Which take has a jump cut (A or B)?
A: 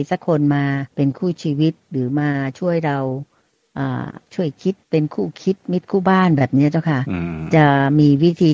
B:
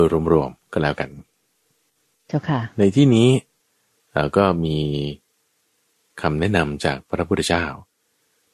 A